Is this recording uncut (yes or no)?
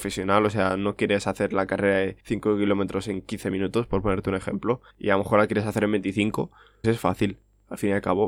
no